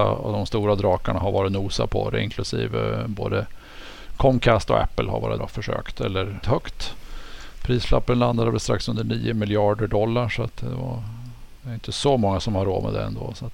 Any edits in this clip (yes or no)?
yes